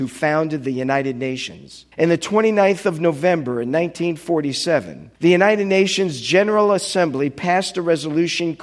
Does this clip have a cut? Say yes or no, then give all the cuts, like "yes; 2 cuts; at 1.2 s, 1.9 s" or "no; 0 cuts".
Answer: yes; 2 cuts; at 1.9 s, 5.1 s